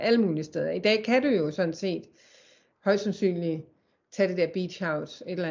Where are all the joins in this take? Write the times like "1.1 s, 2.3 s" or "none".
none